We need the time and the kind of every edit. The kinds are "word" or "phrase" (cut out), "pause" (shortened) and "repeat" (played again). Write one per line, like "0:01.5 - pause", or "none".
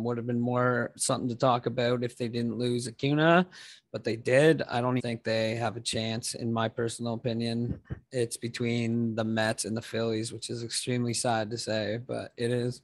0:05.0 - word